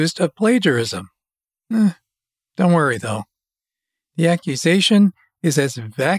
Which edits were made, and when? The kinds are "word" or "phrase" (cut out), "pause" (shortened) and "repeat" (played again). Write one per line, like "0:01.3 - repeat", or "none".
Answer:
none